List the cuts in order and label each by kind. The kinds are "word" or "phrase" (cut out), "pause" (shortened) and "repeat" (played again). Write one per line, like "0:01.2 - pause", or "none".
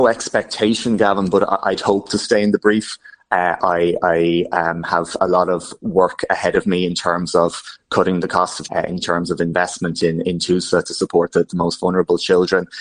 0:05.2 - word
0:08.7 - word
0:10.2 - word
0:11.3 - word